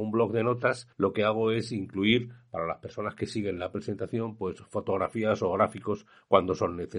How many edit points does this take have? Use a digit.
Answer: 1